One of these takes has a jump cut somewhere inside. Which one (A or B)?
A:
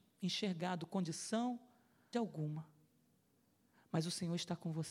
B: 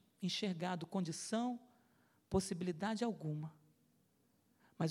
A